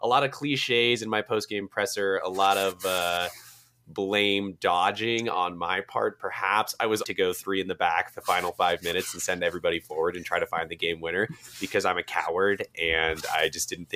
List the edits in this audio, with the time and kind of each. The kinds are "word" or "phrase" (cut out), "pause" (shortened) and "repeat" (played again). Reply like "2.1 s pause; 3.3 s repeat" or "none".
7.0 s phrase; 8.1 s word